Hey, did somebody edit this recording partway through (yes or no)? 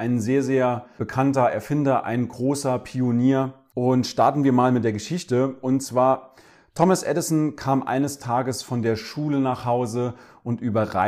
no